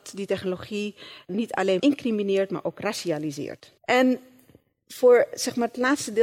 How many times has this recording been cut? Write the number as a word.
three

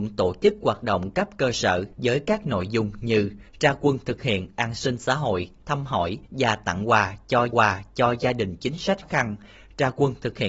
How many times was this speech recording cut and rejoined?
five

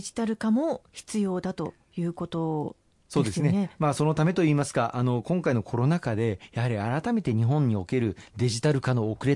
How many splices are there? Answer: zero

